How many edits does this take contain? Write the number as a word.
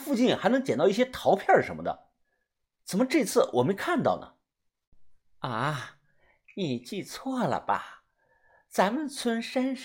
zero